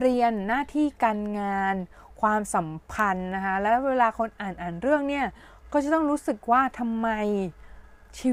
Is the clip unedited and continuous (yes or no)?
yes